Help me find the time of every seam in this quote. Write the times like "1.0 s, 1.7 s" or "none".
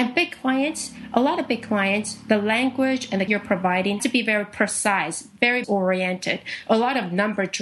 3.3 s, 4.0 s, 5.6 s